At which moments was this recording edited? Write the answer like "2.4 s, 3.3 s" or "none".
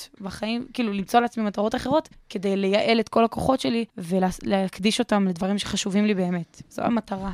2.1 s, 3.9 s